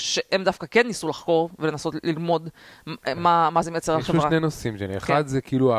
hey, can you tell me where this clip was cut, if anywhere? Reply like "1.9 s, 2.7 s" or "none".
none